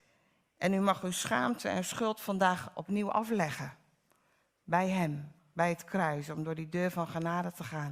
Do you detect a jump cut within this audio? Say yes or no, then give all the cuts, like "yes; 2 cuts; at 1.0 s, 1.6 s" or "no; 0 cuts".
no; 0 cuts